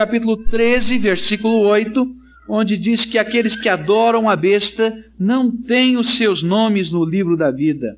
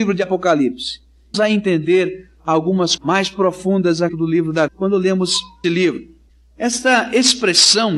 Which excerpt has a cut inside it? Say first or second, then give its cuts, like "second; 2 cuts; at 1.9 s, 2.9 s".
second; 5 cuts; at 1.3 s, 3.0 s, 4.1 s, 4.7 s, 5.6 s